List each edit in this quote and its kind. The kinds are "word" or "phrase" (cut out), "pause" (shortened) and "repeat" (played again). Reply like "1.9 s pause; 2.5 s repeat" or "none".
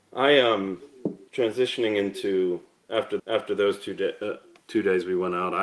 1.3 s pause; 3.2 s repeat